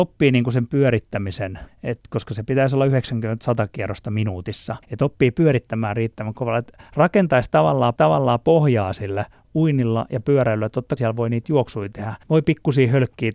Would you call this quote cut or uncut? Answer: cut